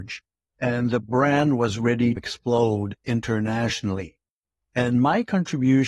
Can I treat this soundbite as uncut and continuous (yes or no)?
no